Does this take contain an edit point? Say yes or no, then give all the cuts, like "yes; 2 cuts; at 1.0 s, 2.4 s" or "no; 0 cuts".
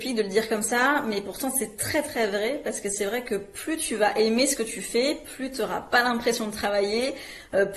no; 0 cuts